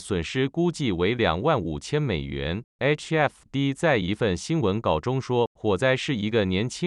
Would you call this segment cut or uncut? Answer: cut